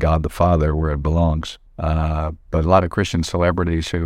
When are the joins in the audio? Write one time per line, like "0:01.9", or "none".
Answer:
0:01.7

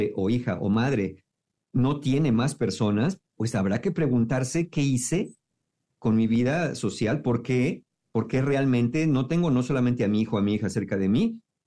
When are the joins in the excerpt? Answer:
none

